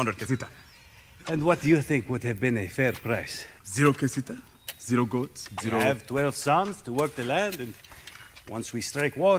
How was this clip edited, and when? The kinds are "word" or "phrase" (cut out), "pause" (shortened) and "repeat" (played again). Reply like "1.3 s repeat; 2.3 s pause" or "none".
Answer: 3.6 s pause